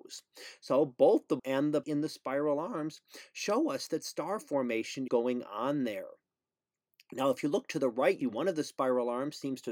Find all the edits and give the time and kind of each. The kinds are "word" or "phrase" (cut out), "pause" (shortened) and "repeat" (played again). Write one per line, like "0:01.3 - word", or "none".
0:01.4 - word
0:01.8 - word
0:05.1 - word
0:08.2 - word

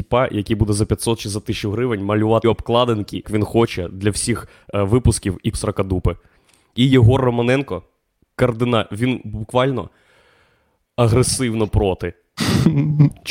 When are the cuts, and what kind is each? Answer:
0:02.4 - word
0:03.2 - word
0:05.5 - word

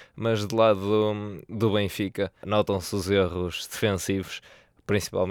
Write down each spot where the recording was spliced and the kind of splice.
0:02.4 - word

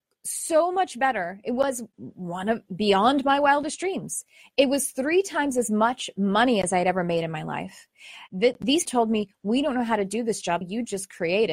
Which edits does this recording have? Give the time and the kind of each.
0:08.8 - word
0:10.6 - word

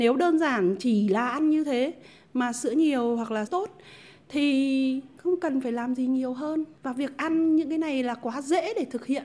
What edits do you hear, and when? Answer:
0:03.5 - word

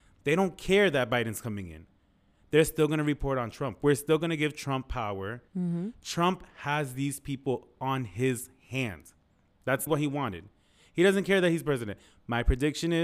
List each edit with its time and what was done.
0:05.5 - pause
0:09.9 - word

